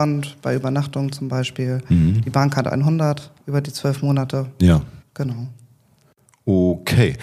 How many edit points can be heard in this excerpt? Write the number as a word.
two